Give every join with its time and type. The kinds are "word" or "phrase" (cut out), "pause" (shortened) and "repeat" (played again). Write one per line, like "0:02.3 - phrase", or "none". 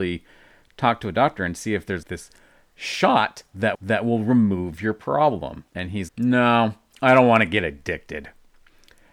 0:02.0 - word
0:03.7 - repeat
0:05.7 - pause
0:06.1 - word